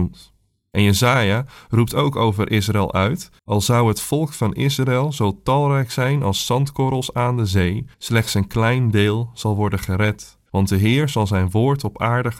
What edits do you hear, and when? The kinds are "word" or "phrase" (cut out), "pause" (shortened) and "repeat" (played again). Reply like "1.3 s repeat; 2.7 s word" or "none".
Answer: 3.4 s pause; 7.9 s pause; 10.5 s pause